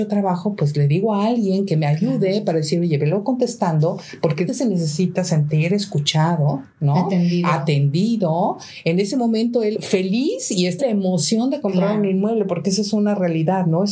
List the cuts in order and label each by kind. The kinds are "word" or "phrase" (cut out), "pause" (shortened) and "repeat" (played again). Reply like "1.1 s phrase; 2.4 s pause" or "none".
4.5 s phrase; 9.7 s word; 10.8 s phrase